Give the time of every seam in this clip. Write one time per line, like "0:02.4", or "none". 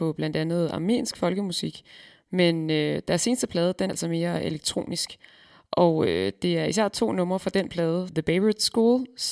0:03.9